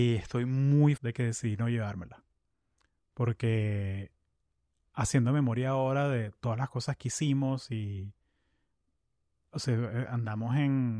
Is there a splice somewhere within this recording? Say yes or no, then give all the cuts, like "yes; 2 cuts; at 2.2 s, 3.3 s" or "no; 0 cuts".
yes; 1 cut; at 1.0 s